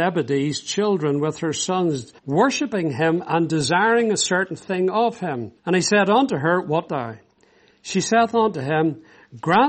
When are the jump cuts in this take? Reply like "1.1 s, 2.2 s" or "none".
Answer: 2.2 s, 5.6 s, 6.9 s

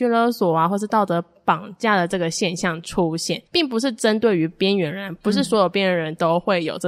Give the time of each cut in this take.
3.5 s

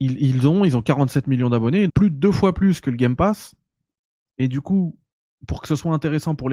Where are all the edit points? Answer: 1.9 s

